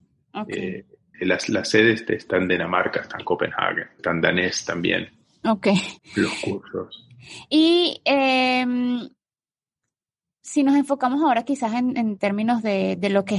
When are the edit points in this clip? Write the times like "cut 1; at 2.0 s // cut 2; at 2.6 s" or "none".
cut 1; at 1.1 s // cut 2; at 4.0 s // cut 3; at 6.0 s